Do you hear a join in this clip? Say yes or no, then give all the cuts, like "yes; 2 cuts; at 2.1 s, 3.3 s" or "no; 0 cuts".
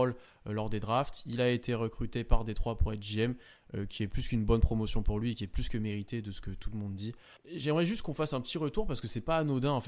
no; 0 cuts